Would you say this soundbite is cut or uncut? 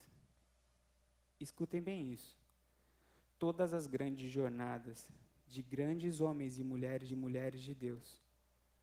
cut